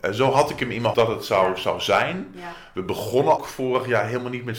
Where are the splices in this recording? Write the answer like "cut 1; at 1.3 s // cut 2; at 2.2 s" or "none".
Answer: cut 1; at 0.9 s // cut 2; at 3.4 s